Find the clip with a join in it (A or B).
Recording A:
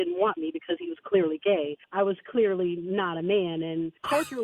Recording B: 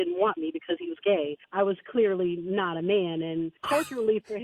B